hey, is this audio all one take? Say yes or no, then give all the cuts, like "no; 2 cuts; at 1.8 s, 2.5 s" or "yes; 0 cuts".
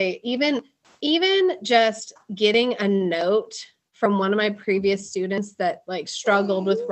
yes; 0 cuts